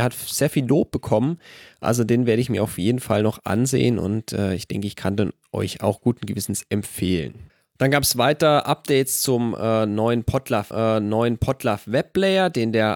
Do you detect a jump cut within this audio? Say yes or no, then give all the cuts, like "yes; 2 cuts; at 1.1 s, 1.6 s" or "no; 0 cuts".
yes; 1 cut; at 10.7 s